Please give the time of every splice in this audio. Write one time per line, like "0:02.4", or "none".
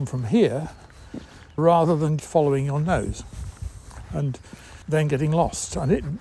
0:01.6
0:02.2
0:04.8